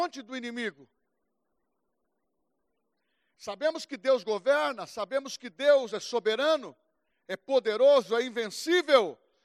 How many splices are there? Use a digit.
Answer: 0